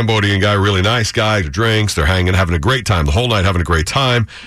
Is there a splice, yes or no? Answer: yes